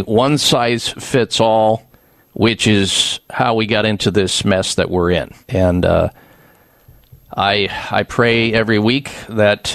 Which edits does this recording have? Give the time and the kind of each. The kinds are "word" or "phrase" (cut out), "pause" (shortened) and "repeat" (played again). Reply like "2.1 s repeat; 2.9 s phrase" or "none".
2.0 s pause; 5.4 s pause